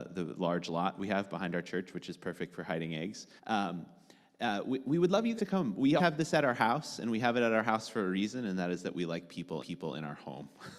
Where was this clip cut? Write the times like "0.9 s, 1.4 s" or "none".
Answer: 3.4 s, 5.4 s, 6.0 s, 9.6 s